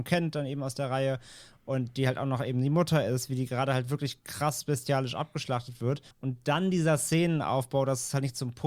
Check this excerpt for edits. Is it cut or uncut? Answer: cut